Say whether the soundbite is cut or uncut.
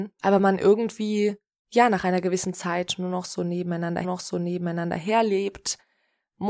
cut